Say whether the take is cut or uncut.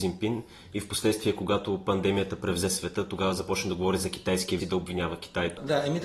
cut